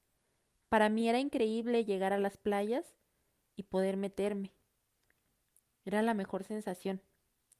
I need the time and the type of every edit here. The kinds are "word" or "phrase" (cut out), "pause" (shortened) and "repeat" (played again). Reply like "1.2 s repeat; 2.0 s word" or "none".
none